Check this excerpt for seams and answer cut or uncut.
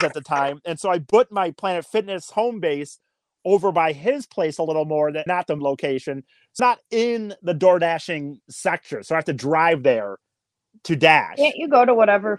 cut